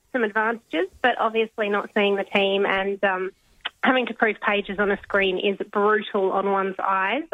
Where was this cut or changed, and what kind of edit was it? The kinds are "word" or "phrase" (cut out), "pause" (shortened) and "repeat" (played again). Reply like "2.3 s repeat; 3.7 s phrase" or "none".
none